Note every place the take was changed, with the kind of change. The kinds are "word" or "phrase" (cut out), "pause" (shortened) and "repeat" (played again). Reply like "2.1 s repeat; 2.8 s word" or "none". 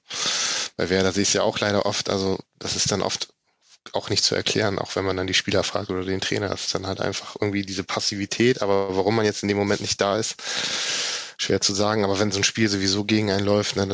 none